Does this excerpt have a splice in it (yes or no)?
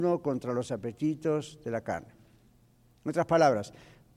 no